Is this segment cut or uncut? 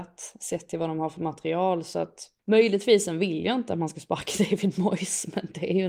cut